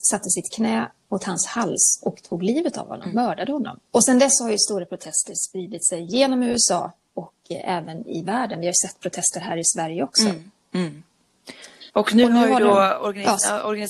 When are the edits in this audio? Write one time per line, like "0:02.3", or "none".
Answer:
0:03.9
0:11.9